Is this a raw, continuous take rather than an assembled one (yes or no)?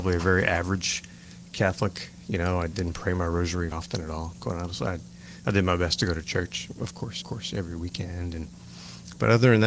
no